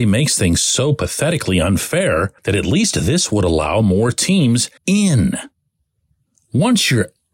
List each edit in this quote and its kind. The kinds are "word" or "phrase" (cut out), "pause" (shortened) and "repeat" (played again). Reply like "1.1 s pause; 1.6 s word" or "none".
2.4 s pause; 4.8 s pause